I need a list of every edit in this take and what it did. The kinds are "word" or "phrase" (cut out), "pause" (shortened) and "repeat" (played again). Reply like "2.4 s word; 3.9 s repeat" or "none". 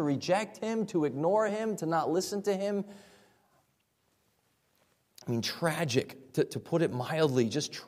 none